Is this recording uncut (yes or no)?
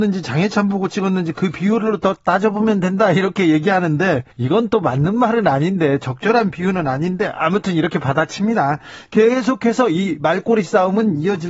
no